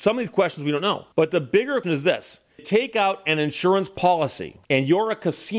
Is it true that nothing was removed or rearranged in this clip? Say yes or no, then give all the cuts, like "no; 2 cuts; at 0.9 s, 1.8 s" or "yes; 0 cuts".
no; 4 cuts; at 1.1 s, 1.8 s, 2.6 s, 4.6 s